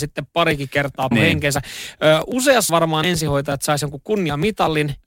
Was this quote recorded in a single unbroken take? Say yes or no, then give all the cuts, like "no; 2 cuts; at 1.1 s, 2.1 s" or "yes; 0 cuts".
no; 3 cuts; at 1.1 s, 2.7 s, 3.0 s